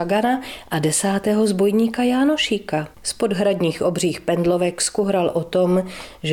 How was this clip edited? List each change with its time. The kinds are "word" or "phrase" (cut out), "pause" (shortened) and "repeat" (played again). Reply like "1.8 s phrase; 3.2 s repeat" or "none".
2.9 s pause